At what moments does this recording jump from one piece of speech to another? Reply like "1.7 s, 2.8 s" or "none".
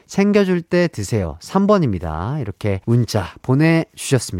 2.8 s